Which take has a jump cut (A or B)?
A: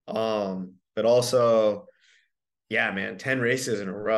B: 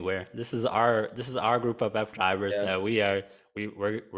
B